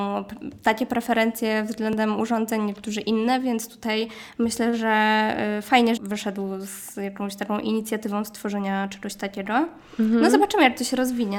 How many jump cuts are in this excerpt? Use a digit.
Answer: 1